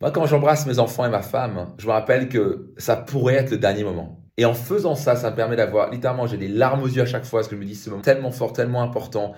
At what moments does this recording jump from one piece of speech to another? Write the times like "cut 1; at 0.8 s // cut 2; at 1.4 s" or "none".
cut 1; at 4.3 s // cut 2; at 8.0 s